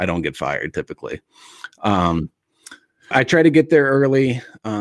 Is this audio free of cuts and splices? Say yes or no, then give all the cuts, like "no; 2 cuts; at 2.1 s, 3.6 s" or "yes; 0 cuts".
no; 1 cut; at 3.1 s